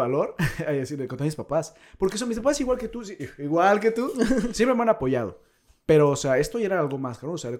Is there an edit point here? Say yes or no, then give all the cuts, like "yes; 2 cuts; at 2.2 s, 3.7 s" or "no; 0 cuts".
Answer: no; 0 cuts